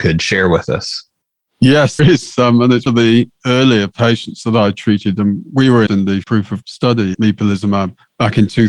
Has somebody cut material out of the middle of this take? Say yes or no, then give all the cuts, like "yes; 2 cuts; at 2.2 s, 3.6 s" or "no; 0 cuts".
yes; 6 cuts; at 2.0 s, 2.9 s, 5.9 s, 6.2 s, 6.6 s, 7.1 s